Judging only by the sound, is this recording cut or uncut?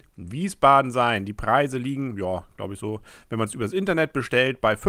uncut